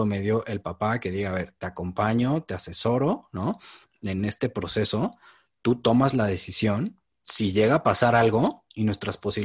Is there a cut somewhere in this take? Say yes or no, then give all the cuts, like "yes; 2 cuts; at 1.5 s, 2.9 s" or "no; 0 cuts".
no; 0 cuts